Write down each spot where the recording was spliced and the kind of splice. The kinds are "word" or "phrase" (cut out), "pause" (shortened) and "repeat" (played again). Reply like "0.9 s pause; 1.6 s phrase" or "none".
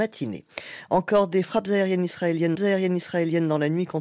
2.5 s repeat